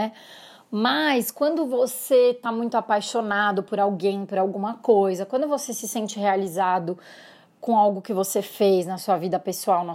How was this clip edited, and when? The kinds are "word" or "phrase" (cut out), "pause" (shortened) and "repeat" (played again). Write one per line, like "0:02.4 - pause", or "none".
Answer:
none